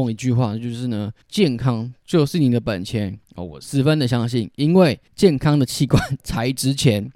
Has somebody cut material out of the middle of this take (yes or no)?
yes